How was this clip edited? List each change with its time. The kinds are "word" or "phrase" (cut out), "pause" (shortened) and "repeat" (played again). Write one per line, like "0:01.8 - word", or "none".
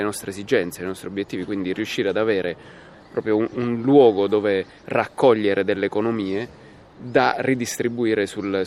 none

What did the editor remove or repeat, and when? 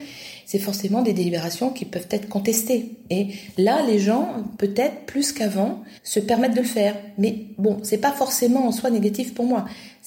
0:06.0 - pause

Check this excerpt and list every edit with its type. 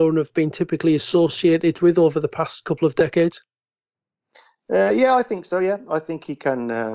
none

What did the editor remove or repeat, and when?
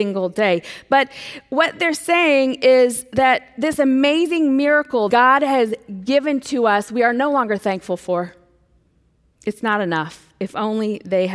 0:05.1 - word
0:08.8 - pause

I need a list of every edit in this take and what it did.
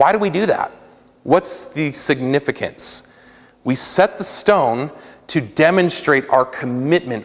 none

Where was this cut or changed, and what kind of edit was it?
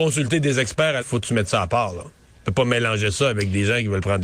0:01.0 - word

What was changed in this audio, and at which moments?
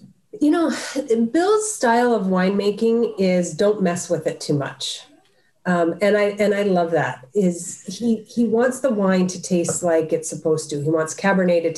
none

